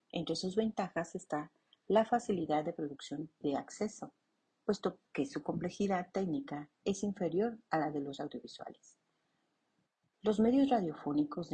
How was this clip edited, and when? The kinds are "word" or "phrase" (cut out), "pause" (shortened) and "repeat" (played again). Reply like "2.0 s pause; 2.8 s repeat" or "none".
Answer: 3.4 s word; 5.1 s pause; 8.2 s word